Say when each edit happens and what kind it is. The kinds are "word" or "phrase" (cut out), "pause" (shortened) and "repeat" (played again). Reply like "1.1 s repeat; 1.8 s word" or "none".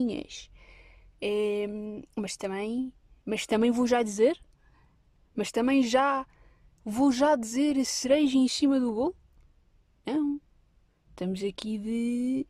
none